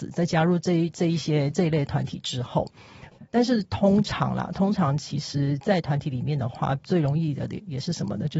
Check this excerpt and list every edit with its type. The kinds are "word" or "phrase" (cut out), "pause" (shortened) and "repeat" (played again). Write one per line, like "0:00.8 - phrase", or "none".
0:03.3 - pause